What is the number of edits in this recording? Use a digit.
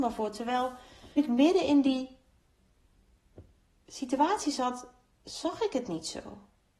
2